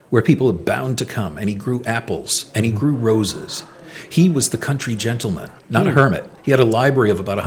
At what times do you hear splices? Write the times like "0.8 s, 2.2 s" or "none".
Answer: 5.6 s, 6.4 s